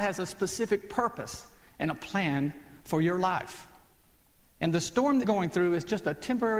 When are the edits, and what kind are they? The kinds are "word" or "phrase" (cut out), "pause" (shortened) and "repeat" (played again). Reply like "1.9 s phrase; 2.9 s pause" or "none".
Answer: 5.2 s word